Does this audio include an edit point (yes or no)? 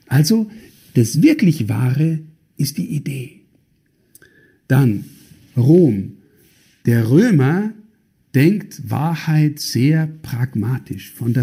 no